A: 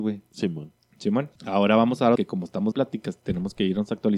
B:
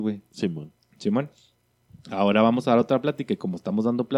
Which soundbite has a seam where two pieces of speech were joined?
A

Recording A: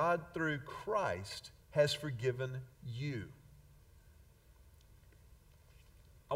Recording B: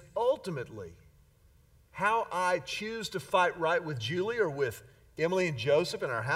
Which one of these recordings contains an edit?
A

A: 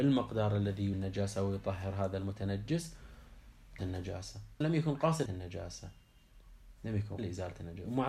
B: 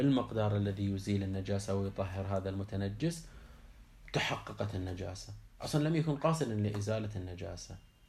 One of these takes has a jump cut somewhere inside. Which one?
A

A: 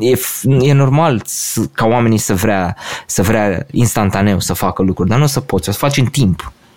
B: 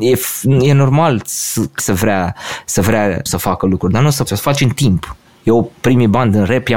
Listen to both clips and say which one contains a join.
B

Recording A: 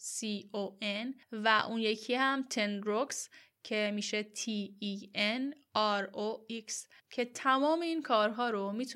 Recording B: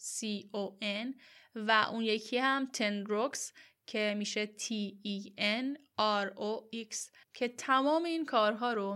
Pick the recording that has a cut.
A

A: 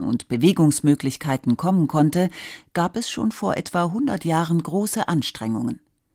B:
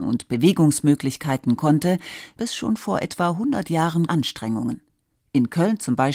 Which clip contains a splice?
B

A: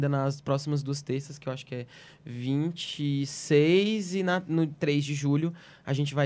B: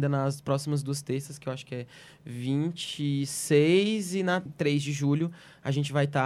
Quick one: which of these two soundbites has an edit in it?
B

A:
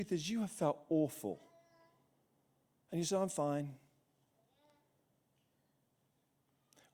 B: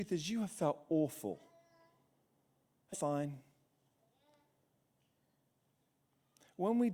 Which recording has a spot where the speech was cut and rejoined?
B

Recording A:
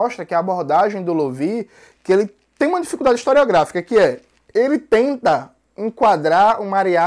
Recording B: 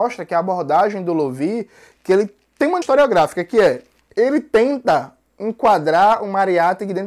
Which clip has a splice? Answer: B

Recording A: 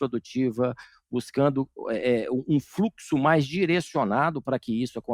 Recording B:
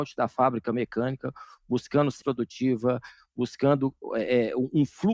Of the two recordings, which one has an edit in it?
B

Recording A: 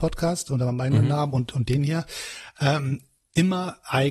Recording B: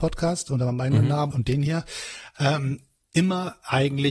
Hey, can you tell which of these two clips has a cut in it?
B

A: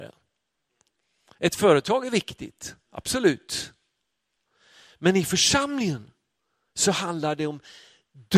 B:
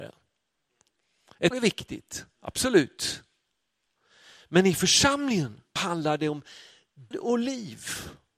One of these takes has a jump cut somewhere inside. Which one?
B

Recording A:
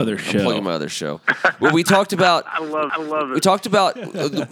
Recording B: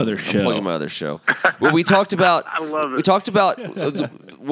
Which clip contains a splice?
A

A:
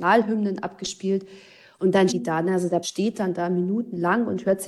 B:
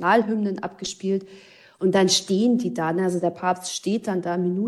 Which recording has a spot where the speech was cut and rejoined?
A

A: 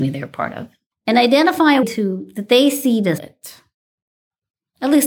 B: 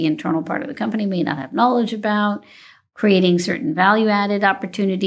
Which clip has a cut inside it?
A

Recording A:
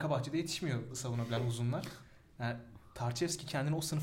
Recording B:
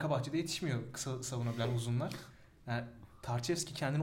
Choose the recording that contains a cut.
A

